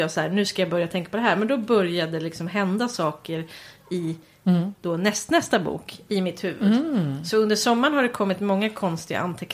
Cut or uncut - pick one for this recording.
uncut